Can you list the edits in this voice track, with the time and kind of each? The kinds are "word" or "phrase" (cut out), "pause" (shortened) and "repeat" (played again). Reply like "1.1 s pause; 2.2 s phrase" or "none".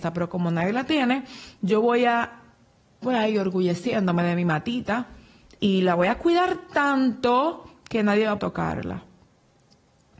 3.0 s word; 8.4 s word

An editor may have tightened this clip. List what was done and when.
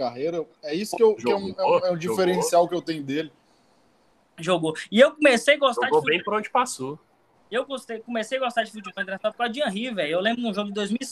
none

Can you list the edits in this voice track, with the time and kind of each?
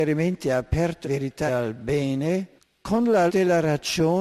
1.0 s word; 1.5 s word; 2.6 s pause; 3.3 s word

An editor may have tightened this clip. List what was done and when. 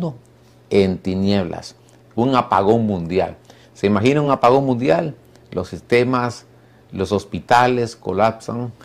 none

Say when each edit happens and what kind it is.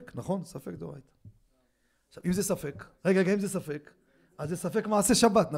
2.9 s pause

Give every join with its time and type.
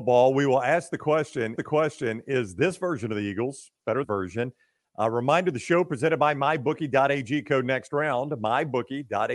1.6 s repeat; 4.0 s phrase

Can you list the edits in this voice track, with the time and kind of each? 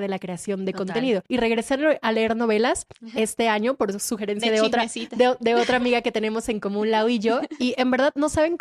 1.3 s pause

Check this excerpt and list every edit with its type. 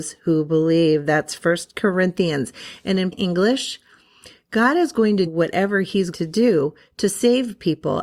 3.1 s word; 5.3 s word; 6.1 s word

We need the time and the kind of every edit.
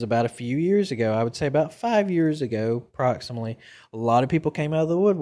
none

